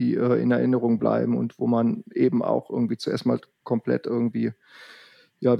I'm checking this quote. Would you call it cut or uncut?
uncut